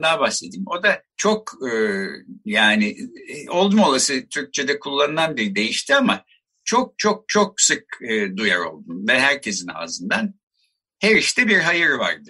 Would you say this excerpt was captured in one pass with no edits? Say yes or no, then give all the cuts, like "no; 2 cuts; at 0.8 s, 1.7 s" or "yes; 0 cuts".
no; 1 cut; at 1.1 s